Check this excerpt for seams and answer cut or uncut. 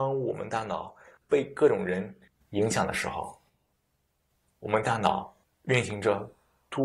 uncut